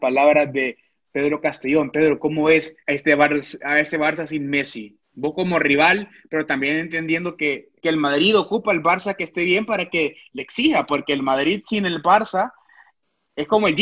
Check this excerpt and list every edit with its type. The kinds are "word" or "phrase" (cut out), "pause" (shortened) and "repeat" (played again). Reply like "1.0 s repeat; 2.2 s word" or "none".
2.8 s pause; 5.0 s pause; 7.8 s pause